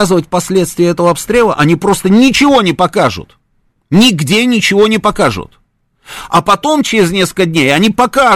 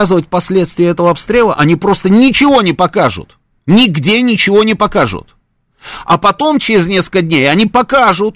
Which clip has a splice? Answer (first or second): second